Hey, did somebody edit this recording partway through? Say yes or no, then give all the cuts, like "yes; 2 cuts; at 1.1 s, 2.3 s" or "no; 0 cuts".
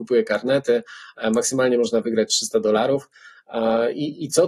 no; 0 cuts